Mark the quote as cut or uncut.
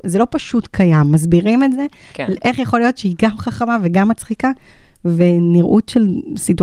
uncut